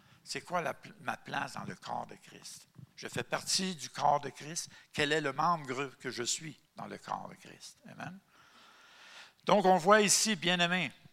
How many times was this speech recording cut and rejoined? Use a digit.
2